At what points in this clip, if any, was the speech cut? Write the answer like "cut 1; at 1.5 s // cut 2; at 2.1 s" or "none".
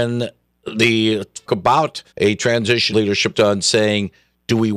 cut 1; at 1.5 s // cut 2; at 2.1 s // cut 3; at 2.9 s // cut 4; at 3.3 s